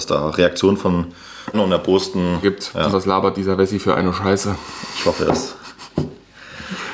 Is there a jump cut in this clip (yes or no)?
yes